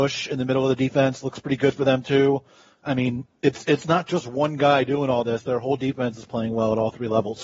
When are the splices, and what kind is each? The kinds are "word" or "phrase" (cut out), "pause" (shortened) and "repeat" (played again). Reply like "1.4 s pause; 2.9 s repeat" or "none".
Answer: none